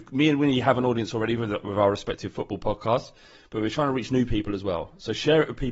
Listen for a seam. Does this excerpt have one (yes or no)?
no